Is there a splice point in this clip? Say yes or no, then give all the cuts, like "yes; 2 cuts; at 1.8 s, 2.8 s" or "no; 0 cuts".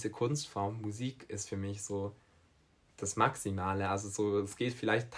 no; 0 cuts